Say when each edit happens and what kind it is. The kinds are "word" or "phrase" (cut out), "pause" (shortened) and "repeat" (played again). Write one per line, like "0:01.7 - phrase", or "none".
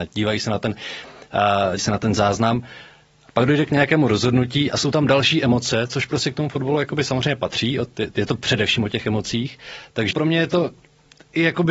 0:01.8 - word
0:10.1 - word